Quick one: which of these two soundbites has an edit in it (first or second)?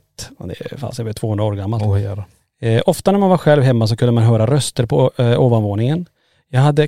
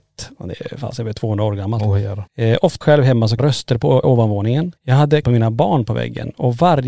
second